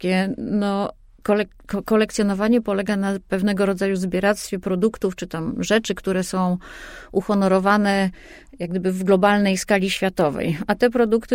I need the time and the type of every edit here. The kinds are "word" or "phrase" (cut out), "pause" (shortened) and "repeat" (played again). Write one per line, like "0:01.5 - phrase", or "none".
none